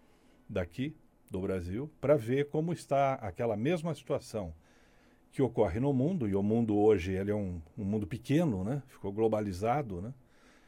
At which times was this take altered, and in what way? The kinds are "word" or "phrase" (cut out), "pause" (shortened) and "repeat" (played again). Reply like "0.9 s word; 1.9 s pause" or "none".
none